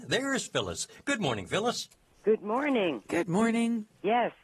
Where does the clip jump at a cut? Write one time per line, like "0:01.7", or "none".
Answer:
0:01.9